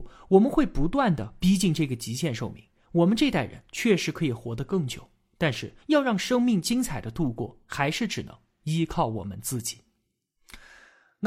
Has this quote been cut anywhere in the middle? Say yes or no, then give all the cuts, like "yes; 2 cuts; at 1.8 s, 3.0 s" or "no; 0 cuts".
yes; 1 cut; at 5.8 s